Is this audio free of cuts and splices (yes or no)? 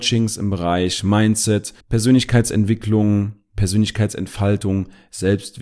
no